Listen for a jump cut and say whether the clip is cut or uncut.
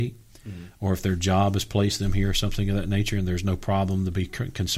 uncut